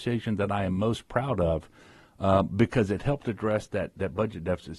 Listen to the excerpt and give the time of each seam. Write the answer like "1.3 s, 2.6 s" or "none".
none